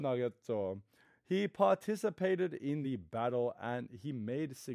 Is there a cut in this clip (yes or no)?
no